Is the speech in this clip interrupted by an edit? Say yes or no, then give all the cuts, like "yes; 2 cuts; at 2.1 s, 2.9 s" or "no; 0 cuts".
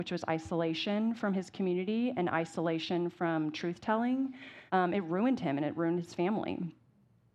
yes; 1 cut; at 4.7 s